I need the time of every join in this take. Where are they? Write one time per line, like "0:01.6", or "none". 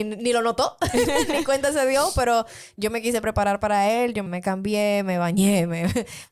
0:04.3